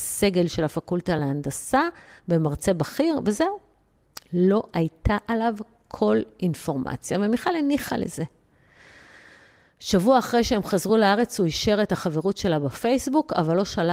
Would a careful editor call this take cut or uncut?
uncut